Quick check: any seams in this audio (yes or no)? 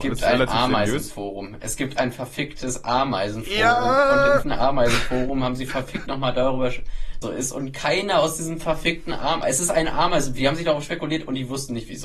yes